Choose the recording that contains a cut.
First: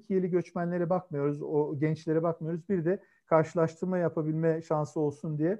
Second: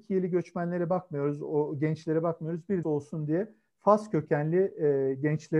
second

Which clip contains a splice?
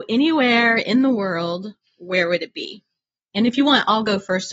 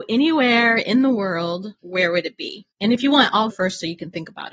second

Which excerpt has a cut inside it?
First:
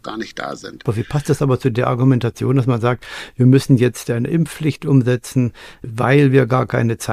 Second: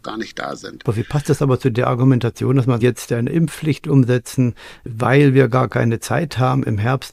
second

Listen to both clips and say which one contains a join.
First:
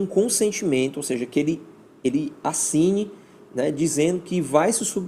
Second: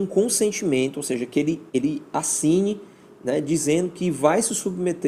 second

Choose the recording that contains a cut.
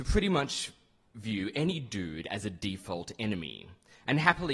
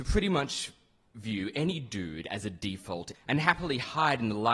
second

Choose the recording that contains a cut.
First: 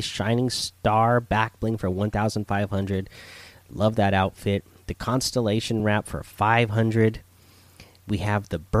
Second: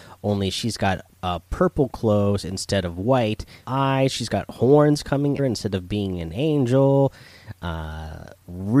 second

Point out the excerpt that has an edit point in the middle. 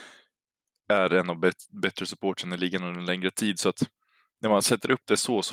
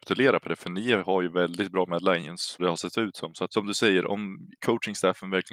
second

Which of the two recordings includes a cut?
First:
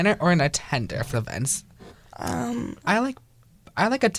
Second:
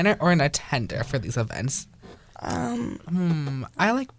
first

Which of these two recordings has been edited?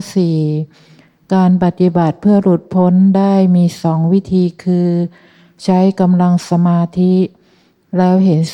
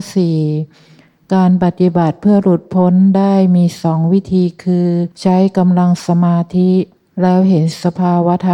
second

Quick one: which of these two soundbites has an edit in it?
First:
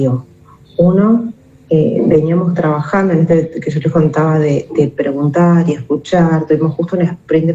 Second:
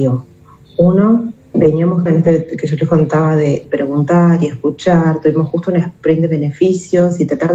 second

